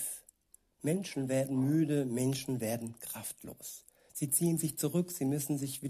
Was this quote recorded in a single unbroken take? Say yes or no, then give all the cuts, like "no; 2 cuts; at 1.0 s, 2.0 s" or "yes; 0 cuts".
yes; 0 cuts